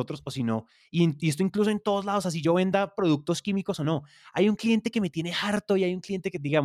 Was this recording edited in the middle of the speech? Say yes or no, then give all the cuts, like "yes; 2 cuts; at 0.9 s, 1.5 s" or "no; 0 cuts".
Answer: no; 0 cuts